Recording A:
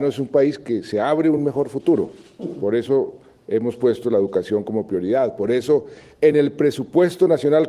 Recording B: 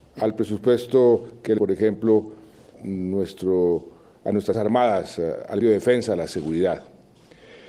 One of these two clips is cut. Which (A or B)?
B